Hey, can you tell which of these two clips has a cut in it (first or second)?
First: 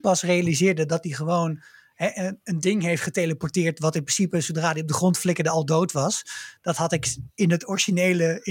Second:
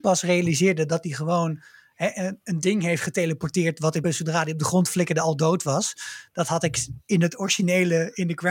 second